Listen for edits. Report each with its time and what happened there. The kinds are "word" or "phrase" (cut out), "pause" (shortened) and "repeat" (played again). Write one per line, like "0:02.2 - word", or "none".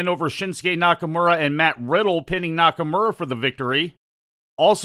none

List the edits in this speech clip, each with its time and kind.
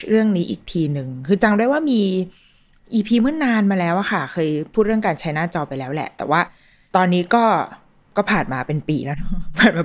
none

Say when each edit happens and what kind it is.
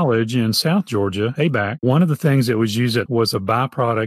0:01.4 - word
0:03.1 - phrase

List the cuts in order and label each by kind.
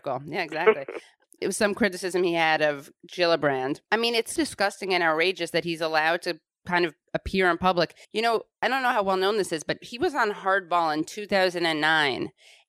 0:01.4 - word
0:03.9 - pause
0:04.4 - word
0:08.0 - pause

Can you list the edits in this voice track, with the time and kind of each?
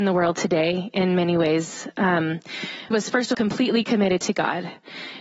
0:02.9 - word
0:03.3 - word

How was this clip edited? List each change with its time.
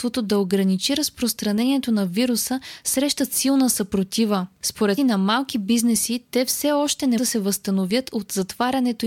0:05.0 - word
0:07.2 - word

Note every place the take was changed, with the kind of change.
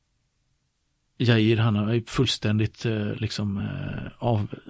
none

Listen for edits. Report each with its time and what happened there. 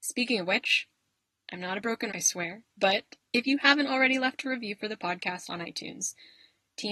0:02.1 - word

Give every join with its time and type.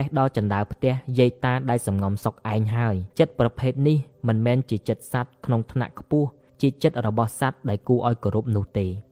0:03.1 - pause

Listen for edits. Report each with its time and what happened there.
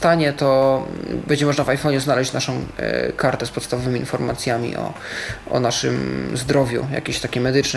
none

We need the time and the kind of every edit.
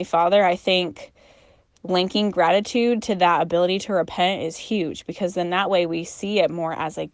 none

